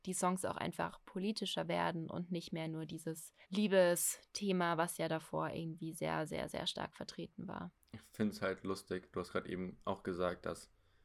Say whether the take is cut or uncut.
cut